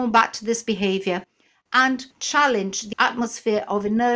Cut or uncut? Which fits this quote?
cut